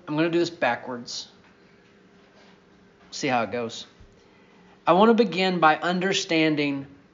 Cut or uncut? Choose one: uncut